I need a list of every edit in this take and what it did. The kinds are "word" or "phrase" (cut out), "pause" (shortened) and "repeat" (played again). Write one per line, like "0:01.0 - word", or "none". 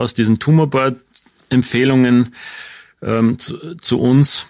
none

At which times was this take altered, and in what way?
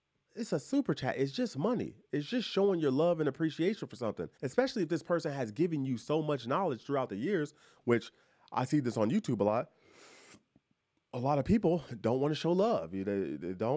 0:04.3 - pause

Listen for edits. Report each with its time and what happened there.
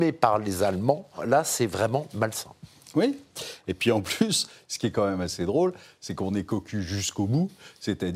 none

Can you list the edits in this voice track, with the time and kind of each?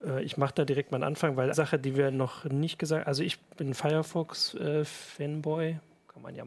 0:01.5 - word

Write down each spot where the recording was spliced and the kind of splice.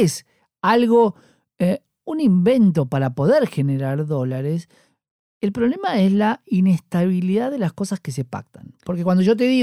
none

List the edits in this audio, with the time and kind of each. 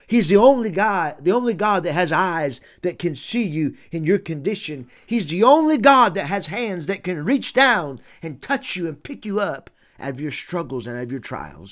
none

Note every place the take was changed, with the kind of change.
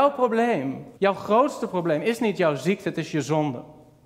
0:01.0 - pause

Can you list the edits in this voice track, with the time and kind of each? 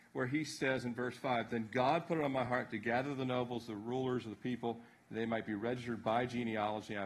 none

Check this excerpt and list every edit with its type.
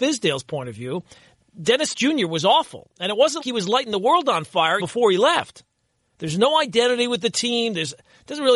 0:01.9 - word
0:03.4 - word
0:04.8 - word

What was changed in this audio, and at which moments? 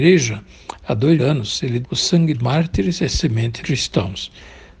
0:01.2 - word
0:01.8 - word
0:02.3 - word
0:03.6 - phrase

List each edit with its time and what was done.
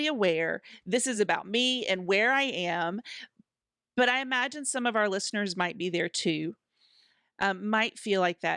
none

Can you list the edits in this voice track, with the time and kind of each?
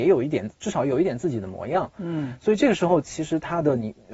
none

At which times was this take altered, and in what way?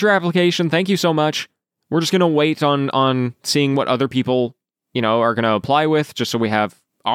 none

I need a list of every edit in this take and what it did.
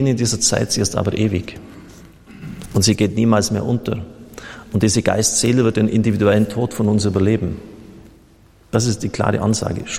none

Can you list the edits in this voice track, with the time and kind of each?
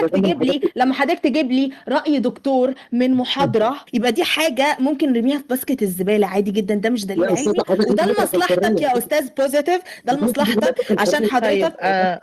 0:03.9 - pause

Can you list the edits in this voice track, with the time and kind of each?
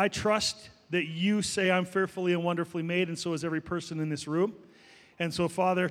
none

